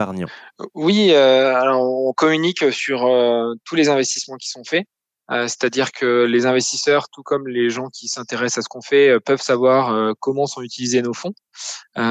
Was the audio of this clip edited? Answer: no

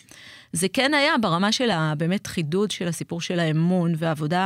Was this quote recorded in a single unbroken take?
yes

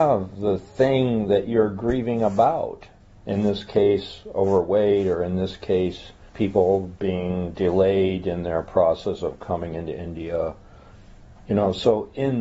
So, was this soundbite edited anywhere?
yes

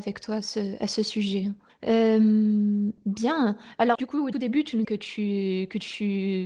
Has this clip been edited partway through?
yes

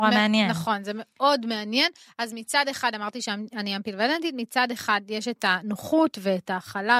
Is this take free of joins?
yes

